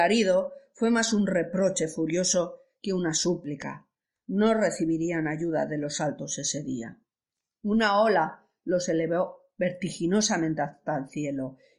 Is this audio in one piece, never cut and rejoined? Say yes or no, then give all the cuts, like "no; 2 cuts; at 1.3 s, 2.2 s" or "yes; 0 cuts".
yes; 0 cuts